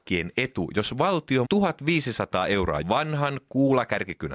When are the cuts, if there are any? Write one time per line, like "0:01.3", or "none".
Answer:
0:01.4
0:02.8